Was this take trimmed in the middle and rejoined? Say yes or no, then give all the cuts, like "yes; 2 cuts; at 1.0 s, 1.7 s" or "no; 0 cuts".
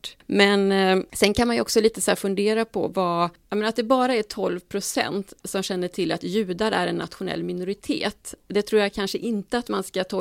no; 0 cuts